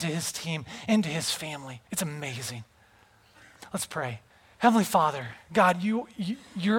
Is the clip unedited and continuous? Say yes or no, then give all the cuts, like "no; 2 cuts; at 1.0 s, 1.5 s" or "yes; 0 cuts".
no; 2 cuts; at 1.9 s, 4.3 s